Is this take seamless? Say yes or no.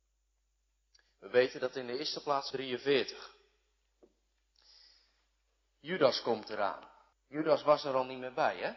no